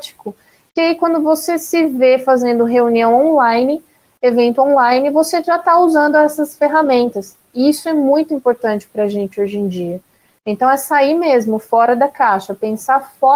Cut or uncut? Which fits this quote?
uncut